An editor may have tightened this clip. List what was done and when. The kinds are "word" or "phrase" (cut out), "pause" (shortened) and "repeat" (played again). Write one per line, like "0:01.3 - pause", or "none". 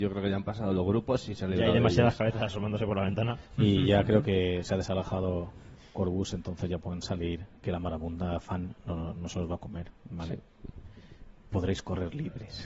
0:10.0 - pause

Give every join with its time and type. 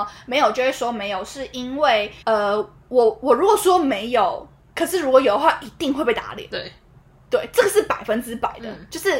0:02.2 - pause
0:04.6 - pause

